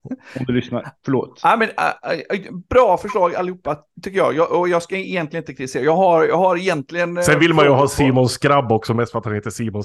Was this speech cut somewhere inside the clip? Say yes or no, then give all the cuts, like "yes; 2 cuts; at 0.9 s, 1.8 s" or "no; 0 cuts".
no; 0 cuts